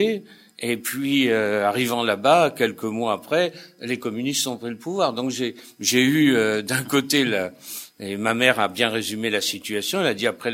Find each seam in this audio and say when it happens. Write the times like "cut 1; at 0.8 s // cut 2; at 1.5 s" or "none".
none